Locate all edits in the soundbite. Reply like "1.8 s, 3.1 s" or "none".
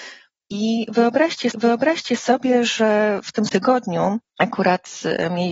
1.5 s, 3.5 s, 4.3 s